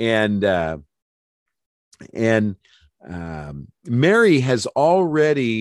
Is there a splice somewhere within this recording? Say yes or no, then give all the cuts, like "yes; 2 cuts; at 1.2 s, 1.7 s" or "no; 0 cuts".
no; 0 cuts